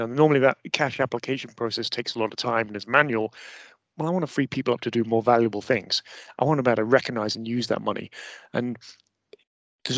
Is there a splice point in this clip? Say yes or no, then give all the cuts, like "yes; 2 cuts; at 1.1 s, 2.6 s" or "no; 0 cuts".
no; 0 cuts